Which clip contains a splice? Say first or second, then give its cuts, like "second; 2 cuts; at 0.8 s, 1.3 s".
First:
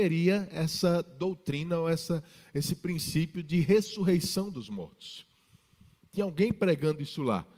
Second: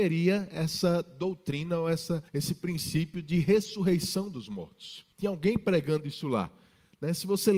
second; 2 cuts; at 2.3 s, 5.1 s